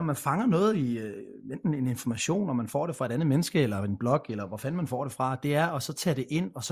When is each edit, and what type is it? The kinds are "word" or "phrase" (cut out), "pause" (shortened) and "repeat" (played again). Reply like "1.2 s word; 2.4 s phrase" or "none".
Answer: none